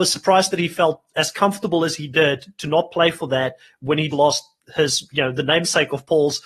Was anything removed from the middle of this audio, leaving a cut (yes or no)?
yes